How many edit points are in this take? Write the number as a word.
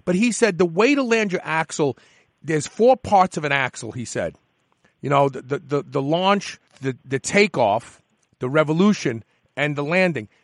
one